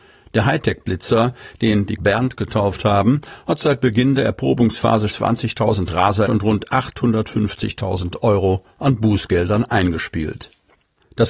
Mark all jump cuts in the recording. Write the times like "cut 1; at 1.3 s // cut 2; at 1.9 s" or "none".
cut 1; at 2.0 s // cut 2; at 5.1 s // cut 3; at 6.3 s